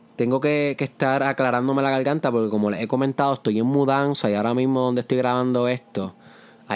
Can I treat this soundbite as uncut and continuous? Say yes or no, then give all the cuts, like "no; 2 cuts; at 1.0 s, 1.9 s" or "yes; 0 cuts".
yes; 0 cuts